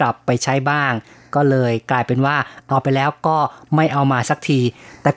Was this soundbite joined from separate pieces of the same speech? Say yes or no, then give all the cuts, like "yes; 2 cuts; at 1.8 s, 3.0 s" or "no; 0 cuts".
no; 0 cuts